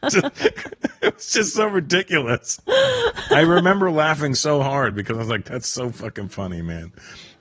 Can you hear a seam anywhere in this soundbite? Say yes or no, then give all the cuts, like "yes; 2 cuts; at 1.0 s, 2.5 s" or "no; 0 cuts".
no; 0 cuts